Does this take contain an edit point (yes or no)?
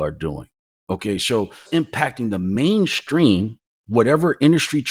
yes